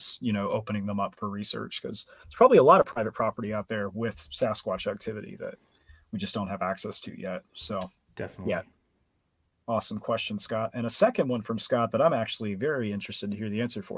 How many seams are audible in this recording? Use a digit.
0